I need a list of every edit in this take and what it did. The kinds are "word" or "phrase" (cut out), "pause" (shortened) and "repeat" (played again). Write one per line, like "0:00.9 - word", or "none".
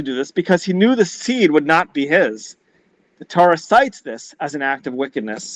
none